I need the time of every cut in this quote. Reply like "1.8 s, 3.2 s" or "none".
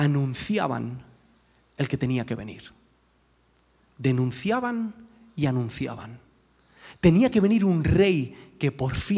none